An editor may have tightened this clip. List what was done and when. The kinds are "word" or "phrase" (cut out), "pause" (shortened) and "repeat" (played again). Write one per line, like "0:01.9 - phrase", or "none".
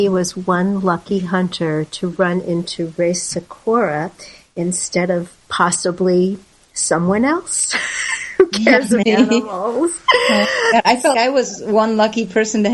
0:09.0 - word
0:11.1 - word